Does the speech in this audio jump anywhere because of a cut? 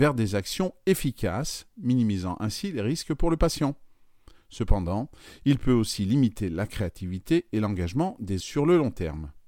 yes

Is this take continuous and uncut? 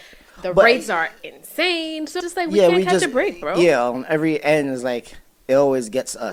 no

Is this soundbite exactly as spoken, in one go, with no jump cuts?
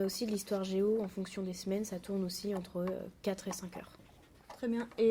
yes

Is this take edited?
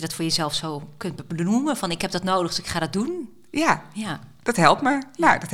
no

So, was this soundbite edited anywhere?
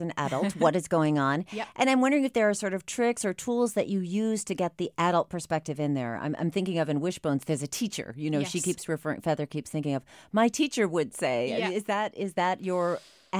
no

